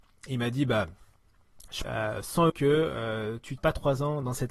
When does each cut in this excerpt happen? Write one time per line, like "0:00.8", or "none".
0:01.8
0:02.5
0:03.6